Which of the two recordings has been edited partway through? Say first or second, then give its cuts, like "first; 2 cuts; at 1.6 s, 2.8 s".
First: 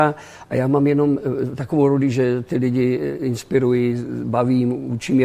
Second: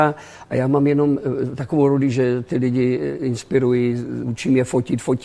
second; 1 cut; at 4.2 s